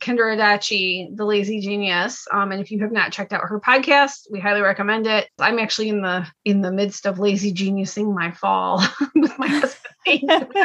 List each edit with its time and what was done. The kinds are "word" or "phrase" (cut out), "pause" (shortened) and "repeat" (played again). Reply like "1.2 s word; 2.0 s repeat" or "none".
none